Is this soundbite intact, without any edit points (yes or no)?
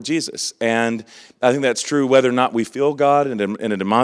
yes